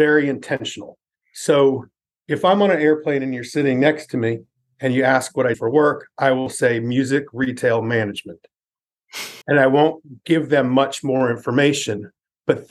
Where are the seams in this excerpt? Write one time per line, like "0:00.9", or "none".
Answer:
0:05.5
0:09.4

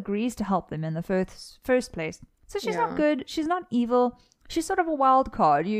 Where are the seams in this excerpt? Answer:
0:02.3

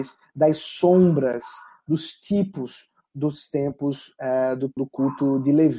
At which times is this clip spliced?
0:04.8

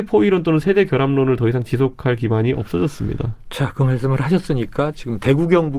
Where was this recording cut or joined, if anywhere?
none

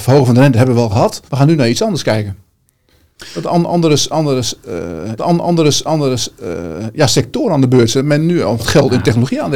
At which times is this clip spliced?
0:01.3
0:05.2
0:08.6

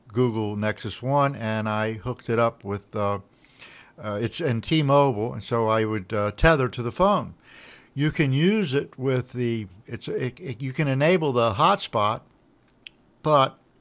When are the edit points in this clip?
none

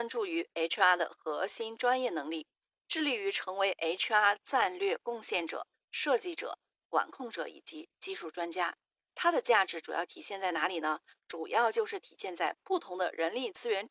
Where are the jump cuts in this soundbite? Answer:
none

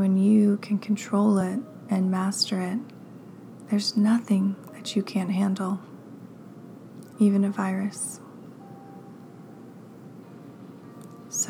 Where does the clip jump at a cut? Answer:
none

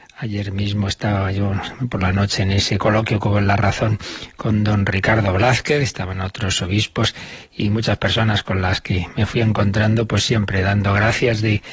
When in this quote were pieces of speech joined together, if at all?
none

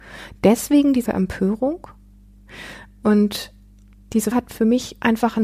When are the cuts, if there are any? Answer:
0:01.1
0:04.3

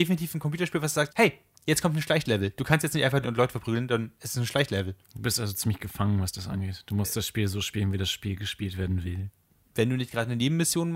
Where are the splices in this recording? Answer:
0:01.1
0:03.2
0:05.0

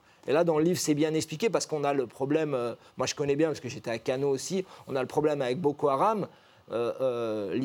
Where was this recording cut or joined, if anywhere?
none

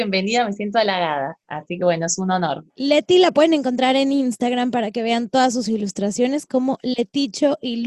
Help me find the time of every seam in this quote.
0:01.4
0:02.7

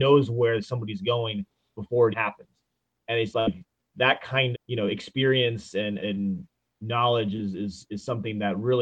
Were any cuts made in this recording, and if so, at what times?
0:02.1
0:03.3
0:04.5
0:06.0

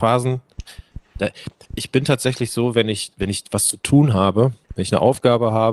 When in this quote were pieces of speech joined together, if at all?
0:01.7

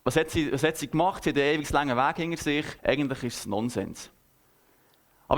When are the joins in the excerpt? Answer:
0:02.8

